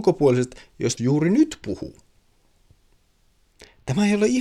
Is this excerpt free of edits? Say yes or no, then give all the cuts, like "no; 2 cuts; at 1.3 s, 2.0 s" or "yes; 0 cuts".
no; 1 cut; at 1.0 s